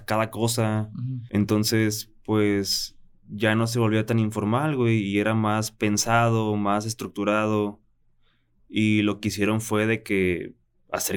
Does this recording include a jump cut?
no; 0 cuts

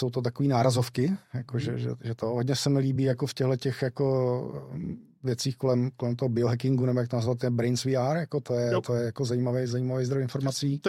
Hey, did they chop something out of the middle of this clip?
no; 0 cuts

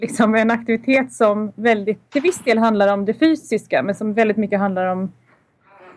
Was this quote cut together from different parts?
yes; 1 cut; at 2.1 s

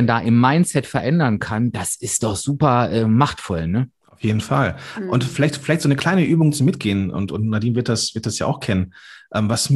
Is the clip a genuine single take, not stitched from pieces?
yes; 0 cuts

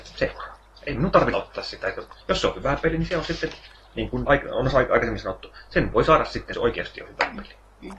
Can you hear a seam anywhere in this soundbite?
yes; 4 cuts; at 1.3 s, 2.2 s, 4.3 s, 6.5 s

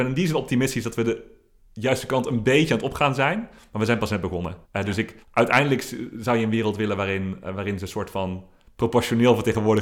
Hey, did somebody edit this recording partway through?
yes; 2 cuts; at 4.6 s, 5.2 s

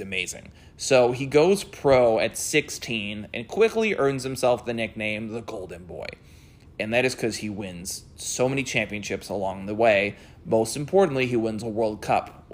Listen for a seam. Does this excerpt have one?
no; 0 cuts

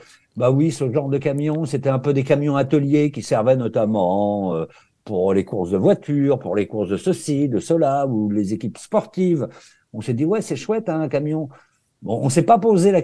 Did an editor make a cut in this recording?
no; 0 cuts

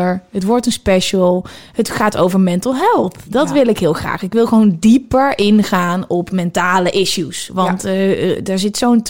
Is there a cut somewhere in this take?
no; 0 cuts

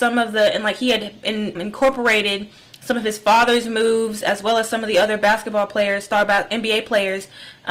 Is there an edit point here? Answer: yes; 1 cut; at 1.5 s

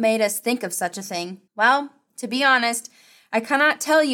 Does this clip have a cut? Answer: yes; 1 cut; at 1.5 s

